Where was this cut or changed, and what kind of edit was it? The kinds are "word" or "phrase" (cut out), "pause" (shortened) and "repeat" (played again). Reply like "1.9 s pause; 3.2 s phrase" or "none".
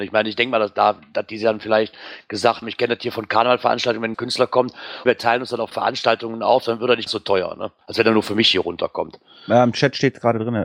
2.6 s word; 4.1 s word; 5.1 s word; 5.7 s word; 7.1 s word; 7.8 s pause